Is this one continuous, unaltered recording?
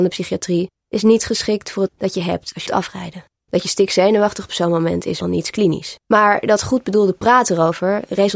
no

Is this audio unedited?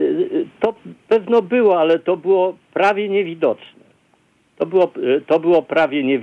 yes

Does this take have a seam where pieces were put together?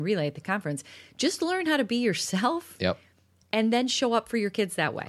no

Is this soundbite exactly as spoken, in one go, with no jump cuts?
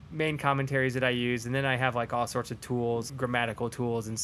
no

